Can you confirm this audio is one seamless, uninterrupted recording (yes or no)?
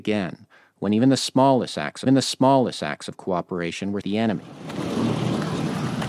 no